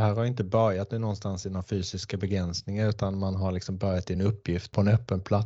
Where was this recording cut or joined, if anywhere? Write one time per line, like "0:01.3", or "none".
none